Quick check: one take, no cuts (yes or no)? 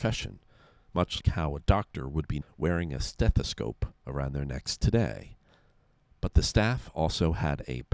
no